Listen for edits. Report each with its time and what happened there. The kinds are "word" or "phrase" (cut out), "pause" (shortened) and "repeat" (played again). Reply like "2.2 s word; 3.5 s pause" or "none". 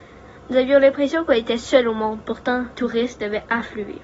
2.7 s word

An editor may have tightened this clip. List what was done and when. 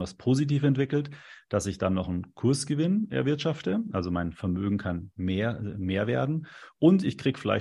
none

